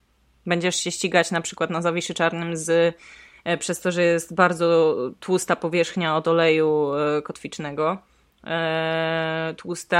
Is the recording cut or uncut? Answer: uncut